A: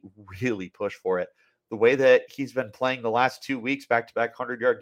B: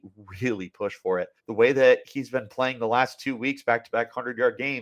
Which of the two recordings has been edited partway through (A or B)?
B